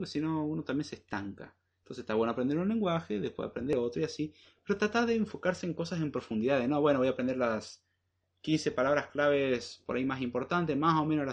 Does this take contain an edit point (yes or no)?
no